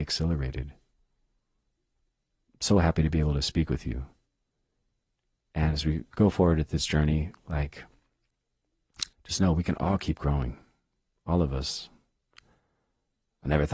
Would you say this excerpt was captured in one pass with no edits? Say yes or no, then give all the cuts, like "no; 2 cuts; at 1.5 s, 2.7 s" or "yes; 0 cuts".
no; 1 cut; at 9.1 s